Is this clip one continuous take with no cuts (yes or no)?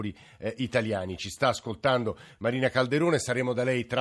yes